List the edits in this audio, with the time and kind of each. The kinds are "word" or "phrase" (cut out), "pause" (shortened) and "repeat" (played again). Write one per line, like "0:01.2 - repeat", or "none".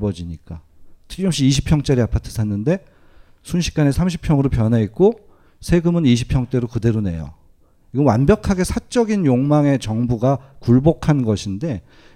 none